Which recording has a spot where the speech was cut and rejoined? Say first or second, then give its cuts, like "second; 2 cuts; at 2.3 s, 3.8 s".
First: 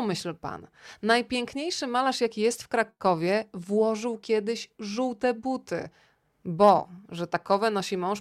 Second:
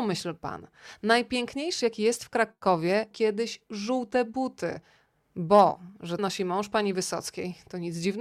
second; 3 cuts; at 1.8 s, 3.1 s, 6.2 s